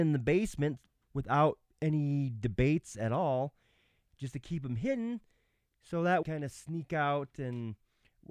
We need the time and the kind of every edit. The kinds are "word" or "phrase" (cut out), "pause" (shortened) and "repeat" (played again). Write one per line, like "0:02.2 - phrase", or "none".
0:01.0 - pause
0:06.2 - phrase